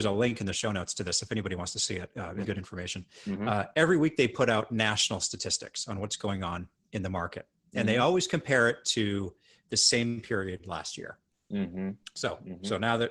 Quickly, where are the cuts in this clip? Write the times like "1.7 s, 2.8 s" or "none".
2.4 s